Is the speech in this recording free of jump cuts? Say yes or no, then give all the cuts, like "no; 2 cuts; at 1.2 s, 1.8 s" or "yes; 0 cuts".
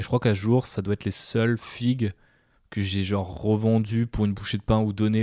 yes; 0 cuts